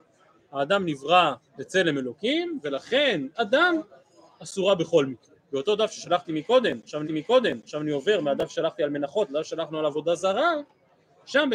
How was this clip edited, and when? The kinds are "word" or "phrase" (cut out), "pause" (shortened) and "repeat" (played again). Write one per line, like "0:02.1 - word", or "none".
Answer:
0:01.5 - pause
0:03.3 - word
0:05.4 - pause
0:07.0 - repeat